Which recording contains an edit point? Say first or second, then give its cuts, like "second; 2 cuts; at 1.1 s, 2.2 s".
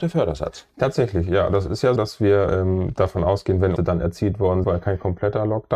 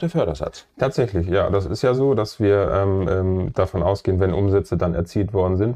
first; 4 cuts; at 2.0 s, 2.5 s, 3.8 s, 4.6 s